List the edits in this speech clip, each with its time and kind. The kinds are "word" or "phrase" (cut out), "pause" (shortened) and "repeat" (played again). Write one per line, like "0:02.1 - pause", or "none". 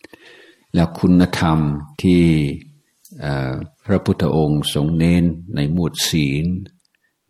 0:01.9 - pause
0:03.7 - pause

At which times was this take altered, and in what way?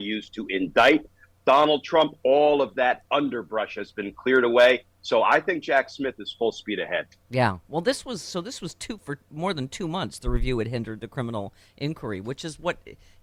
0:03.1 - pause

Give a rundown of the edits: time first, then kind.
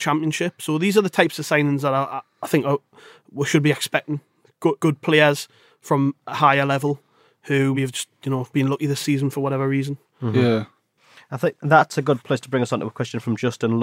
0:02.3 - word
0:04.8 - word
0:07.7 - word
0:08.5 - word

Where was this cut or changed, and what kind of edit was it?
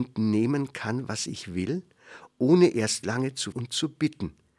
0:03.5 - word

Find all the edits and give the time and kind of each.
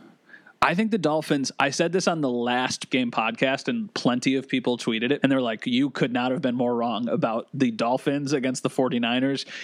0:02.9 - word
0:05.2 - word

